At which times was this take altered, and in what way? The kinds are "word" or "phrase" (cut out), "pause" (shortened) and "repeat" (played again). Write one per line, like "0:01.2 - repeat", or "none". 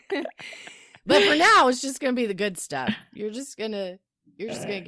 none